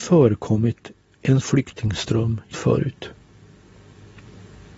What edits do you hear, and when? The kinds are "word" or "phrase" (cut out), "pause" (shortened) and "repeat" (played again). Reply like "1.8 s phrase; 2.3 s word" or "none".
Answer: 1.4 s word; 2.5 s word